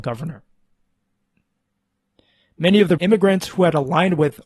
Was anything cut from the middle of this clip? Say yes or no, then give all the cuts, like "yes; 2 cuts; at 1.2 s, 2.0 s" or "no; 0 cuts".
yes; 1 cut; at 3.0 s